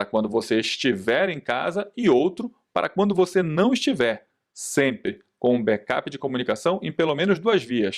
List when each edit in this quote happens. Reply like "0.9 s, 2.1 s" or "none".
none